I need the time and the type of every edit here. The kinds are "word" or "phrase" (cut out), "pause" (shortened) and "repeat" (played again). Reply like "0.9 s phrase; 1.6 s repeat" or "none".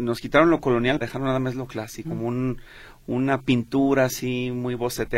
1.0 s word; 2.0 s word